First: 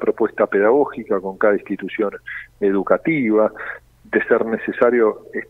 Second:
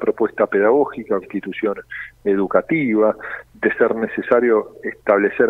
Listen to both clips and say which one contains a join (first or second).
second